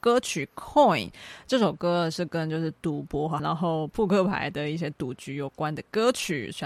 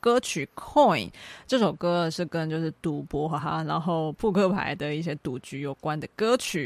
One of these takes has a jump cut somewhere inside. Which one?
first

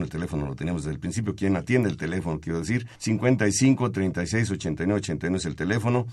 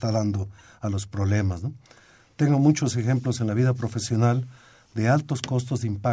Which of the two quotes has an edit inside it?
first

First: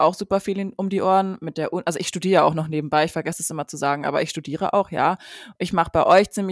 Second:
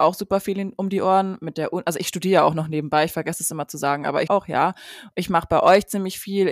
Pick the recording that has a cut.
second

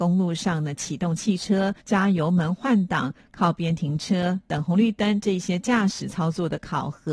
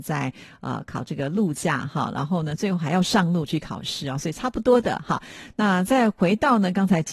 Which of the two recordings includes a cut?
first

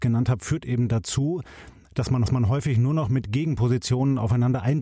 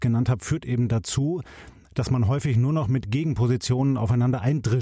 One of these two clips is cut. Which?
first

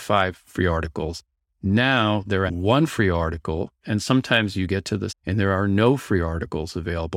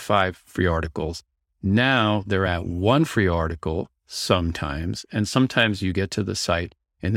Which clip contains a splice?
first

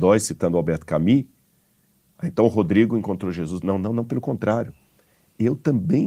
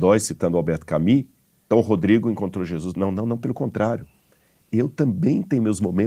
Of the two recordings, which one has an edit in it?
second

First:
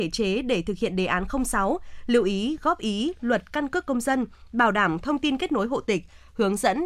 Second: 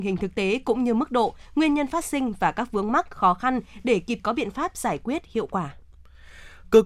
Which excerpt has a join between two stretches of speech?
second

